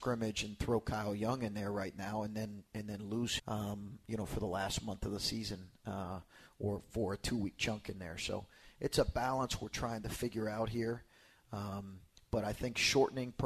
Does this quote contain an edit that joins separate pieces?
yes; 1 cut; at 3.4 s

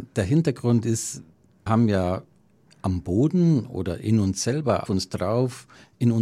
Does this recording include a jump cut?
yes; 2 cuts; at 1.7 s, 4.9 s

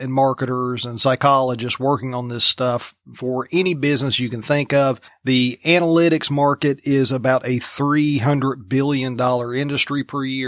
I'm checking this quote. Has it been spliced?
no; 0 cuts

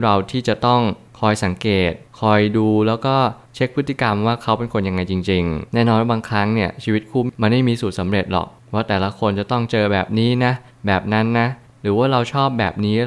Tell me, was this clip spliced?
yes; 1 cut; at 5.7 s

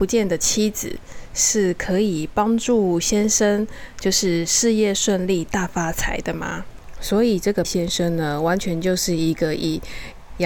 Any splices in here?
yes; 1 cut; at 7.6 s

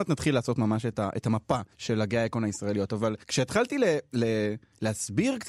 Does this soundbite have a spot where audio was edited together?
yes; 2 cuts; at 1.7 s, 3.2 s

